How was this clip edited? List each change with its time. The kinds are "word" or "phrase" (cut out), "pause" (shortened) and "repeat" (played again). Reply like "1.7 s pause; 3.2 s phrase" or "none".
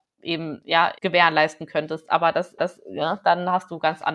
1.0 s pause; 2.6 s repeat